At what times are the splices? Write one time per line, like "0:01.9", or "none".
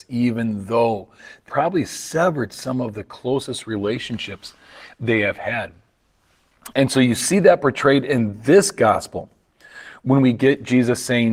0:01.5